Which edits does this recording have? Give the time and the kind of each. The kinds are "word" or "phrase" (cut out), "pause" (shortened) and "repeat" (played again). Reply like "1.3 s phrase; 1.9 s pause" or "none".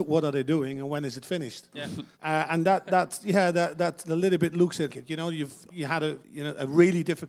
2.1 s pause; 4.9 s word; 5.7 s word; 6.2 s pause